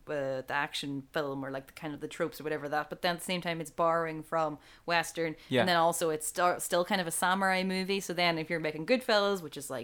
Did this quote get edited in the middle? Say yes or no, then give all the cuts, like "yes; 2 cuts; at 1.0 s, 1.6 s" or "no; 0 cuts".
no; 0 cuts